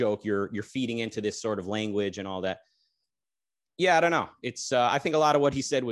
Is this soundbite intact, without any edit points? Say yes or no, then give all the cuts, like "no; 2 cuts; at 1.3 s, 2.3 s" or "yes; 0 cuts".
yes; 0 cuts